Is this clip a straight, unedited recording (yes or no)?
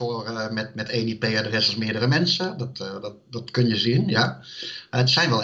yes